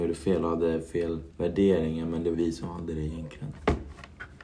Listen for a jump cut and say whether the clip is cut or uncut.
cut